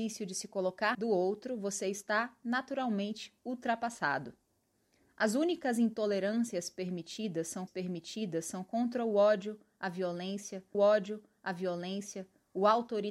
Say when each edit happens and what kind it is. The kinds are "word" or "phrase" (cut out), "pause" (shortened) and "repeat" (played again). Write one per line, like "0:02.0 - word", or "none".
0:00.9 - phrase
0:07.7 - repeat
0:10.7 - repeat